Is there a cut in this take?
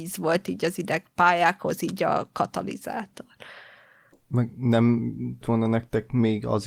yes; 1 cut; at 5.4 s

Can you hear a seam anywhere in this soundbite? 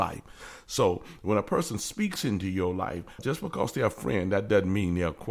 yes; 1 cut; at 3.2 s

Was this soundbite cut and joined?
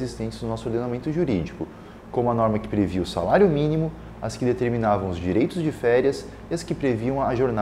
no; 0 cuts

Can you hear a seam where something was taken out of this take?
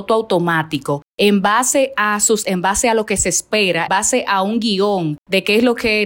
yes; 2 cuts; at 2.4 s, 3.9 s

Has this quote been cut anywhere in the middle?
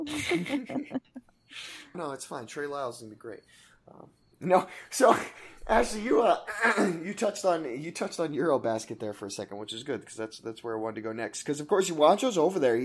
yes; 1 cut; at 1.9 s

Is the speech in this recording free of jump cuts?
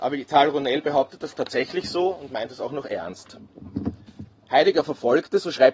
yes; 0 cuts

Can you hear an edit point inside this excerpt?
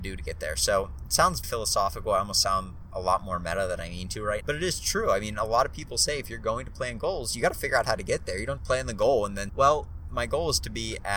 yes; 4 cuts; at 1.4 s, 4.4 s, 8.6 s, 9.5 s

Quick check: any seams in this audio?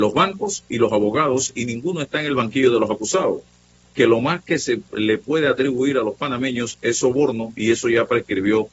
no; 0 cuts

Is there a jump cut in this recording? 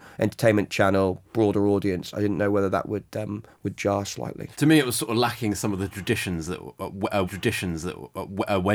yes; 2 cuts; at 4.5 s, 7.2 s

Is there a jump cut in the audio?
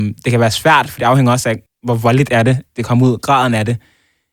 yes; 2 cuts; at 1.7 s, 2.7 s

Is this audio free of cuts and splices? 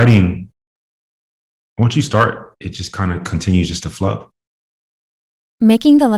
yes; 0 cuts

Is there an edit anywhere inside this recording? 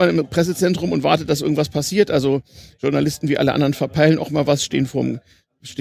no; 0 cuts

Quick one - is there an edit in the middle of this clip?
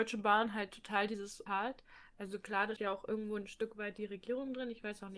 yes; 2 cuts; at 1.5 s, 2.8 s

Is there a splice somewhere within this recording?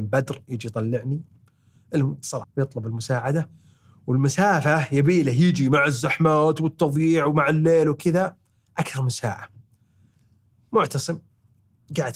yes; 1 cut; at 2.4 s

